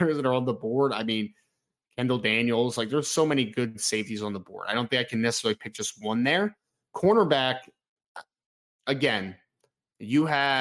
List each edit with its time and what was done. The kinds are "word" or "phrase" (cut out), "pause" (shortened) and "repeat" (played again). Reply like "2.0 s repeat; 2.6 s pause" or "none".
none